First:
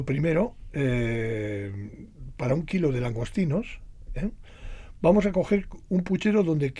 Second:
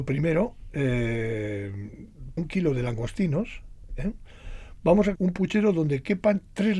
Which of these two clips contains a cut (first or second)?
second